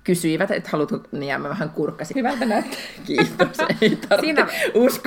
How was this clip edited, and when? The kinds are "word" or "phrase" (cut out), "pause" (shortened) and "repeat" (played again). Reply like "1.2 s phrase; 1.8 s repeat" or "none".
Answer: 2.1 s word